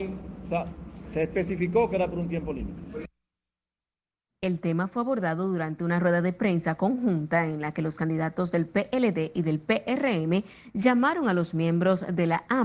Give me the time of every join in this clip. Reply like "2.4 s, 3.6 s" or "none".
none

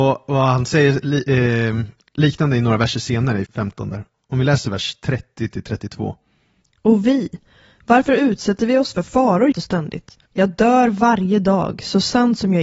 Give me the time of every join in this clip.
3.5 s, 9.5 s, 10.3 s

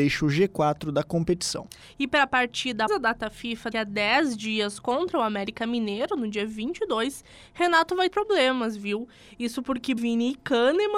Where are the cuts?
2.9 s, 3.7 s, 8.1 s, 10.0 s

